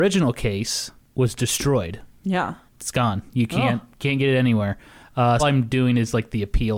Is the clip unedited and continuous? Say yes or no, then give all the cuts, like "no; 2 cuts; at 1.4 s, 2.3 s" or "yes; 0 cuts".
no; 1 cut; at 5.4 s